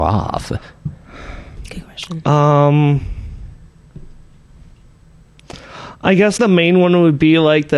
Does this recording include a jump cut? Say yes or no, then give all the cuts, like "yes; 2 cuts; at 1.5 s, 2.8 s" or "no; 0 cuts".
yes; 1 cut; at 6.4 s